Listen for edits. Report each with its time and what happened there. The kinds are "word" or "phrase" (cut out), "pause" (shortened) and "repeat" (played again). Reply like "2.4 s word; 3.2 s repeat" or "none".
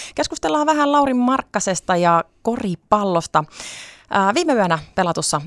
none